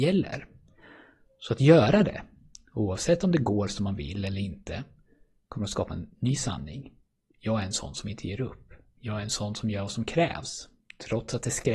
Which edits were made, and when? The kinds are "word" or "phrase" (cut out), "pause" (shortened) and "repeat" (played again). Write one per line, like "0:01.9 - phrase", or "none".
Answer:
none